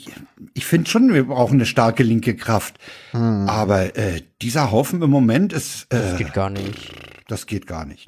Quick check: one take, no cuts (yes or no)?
yes